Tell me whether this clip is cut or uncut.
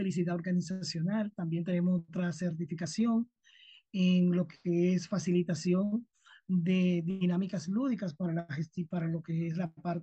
uncut